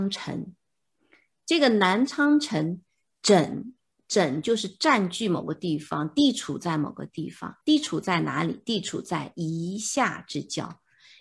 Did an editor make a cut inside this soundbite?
yes; 1 cut; at 7.6 s

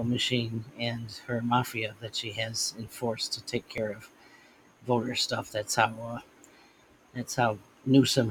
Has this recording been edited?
no; 0 cuts

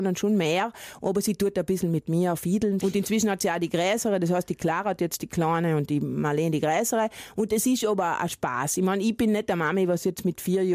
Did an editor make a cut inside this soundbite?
yes; 1 cut; at 2.8 s

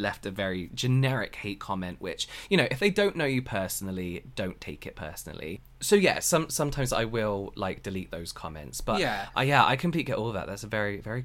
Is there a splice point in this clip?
no; 0 cuts

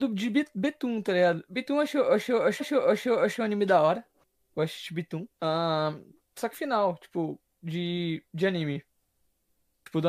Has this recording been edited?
yes; 3 cuts; at 2.6 s, 5.3 s, 6.5 s

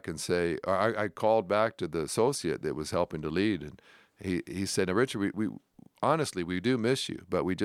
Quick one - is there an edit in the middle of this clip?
no; 0 cuts

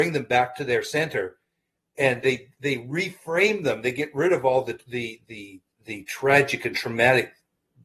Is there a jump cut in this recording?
no; 0 cuts

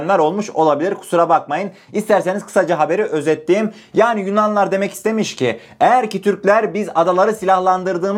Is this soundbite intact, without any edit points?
yes; 0 cuts

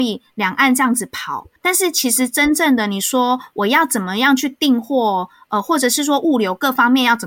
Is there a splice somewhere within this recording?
yes; 1 cut; at 1.6 s

